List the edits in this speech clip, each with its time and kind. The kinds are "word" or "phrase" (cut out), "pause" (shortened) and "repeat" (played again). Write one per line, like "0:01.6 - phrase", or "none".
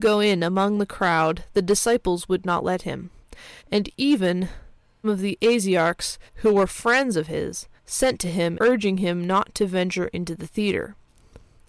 0:03.6 - pause
0:05.0 - word
0:06.3 - pause
0:07.8 - pause
0:08.5 - phrase

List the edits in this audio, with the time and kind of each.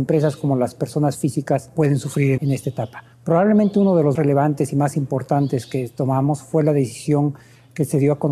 0:02.4 - word
0:03.1 - pause
0:04.1 - word

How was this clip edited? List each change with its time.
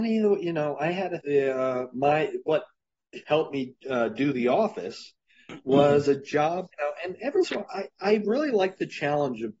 0:01.2 - word
0:03.2 - word
0:03.8 - pause
0:06.7 - pause
0:07.4 - word

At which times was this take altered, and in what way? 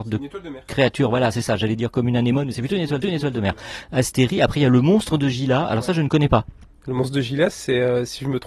0:03.0 - repeat

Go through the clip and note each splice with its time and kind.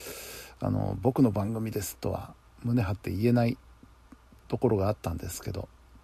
none

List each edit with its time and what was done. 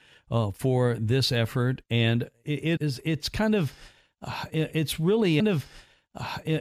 0:02.8 - word
0:05.4 - repeat

